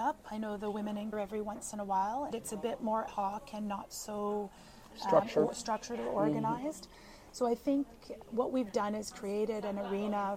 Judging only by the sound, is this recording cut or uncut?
cut